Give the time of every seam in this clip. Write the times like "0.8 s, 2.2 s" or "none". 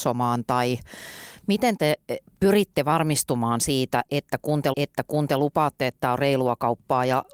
4.7 s

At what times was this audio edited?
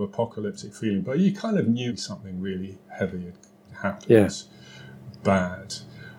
1.9 s

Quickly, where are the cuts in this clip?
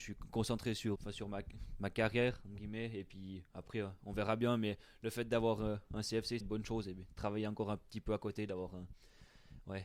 1.0 s, 6.4 s

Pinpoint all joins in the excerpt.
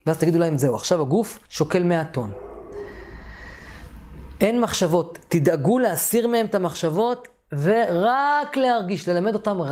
1.4 s

